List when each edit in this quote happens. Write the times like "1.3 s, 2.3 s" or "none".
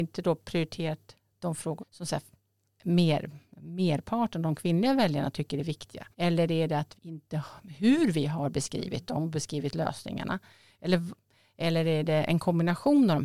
1.8 s, 6.1 s, 7.0 s